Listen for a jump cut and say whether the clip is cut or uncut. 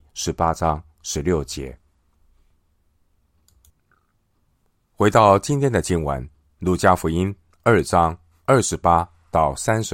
uncut